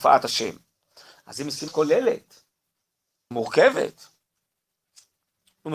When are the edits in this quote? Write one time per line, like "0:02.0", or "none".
0:01.7
0:03.3

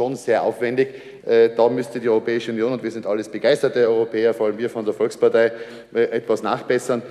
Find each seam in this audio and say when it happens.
none

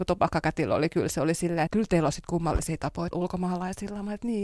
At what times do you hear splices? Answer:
0:01.7
0:03.1

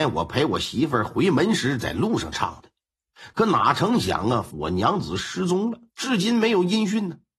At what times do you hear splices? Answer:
0:04.5
0:05.9

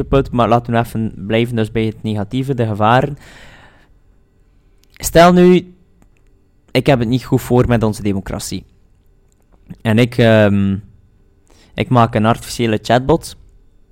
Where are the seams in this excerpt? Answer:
none

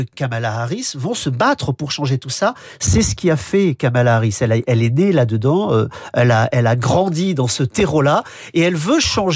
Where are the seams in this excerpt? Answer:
none

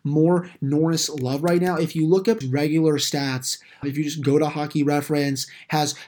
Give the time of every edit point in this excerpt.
0:02.4
0:03.8

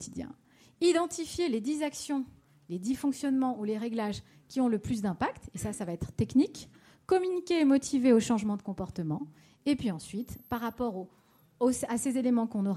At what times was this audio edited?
none

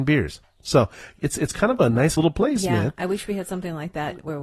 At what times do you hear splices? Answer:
0:01.2
0:02.2

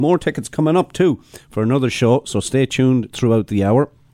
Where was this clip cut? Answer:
none

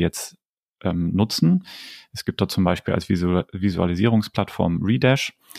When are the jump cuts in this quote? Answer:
none

